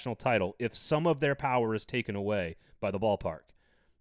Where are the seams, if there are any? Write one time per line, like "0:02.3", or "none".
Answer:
none